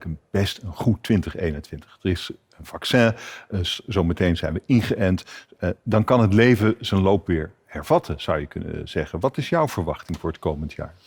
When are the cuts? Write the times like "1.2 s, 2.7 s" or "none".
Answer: none